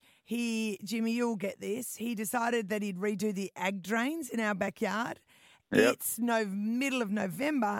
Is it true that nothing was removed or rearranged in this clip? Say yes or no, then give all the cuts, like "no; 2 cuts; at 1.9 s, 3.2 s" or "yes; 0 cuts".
yes; 0 cuts